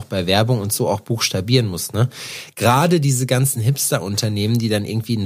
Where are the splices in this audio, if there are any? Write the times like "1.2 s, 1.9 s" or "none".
none